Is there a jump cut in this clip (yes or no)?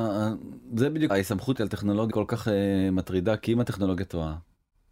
yes